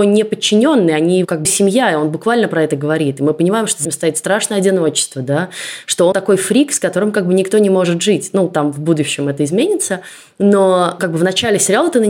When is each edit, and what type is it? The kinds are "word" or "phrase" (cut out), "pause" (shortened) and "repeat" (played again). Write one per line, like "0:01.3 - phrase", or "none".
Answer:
0:01.4 - word
0:03.8 - word
0:06.1 - word